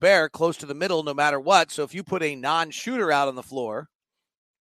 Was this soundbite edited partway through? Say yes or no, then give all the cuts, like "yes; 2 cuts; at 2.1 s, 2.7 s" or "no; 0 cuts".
no; 0 cuts